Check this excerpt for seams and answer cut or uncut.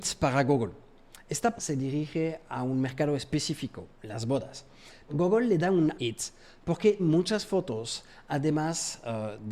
cut